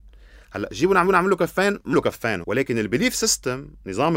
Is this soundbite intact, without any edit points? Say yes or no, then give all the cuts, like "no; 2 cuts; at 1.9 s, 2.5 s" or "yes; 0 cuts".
no; 3 cuts; at 1.1 s, 1.9 s, 2.4 s